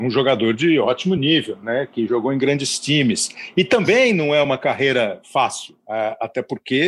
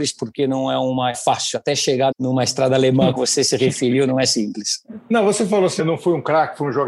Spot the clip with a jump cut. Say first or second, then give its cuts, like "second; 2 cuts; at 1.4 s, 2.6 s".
second; 4 cuts; at 1.1 s, 2.1 s, 3.2 s, 5.8 s